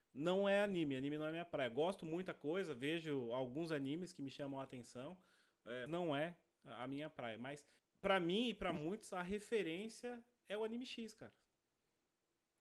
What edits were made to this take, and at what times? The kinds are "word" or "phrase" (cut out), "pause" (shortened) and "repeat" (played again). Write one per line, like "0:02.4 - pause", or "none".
0:05.9 - word
0:07.8 - pause

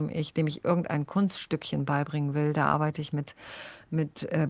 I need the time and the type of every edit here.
none

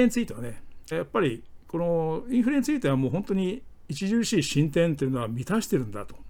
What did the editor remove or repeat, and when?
0:00.9 - phrase

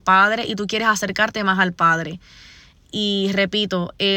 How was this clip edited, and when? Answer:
none

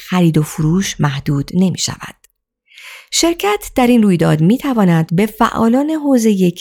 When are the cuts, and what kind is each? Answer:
none

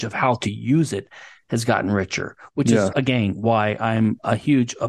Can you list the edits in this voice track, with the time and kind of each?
none

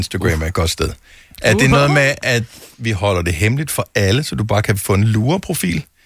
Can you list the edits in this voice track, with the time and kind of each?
none

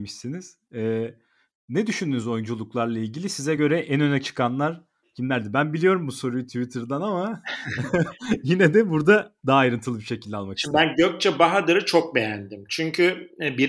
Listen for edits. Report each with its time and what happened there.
none

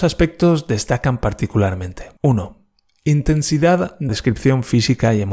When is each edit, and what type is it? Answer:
0:02.2 - pause
0:04.1 - word

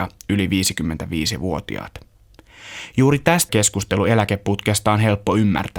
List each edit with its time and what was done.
0:03.5 - word

